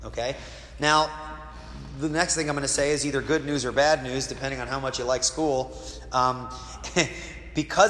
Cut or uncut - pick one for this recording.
uncut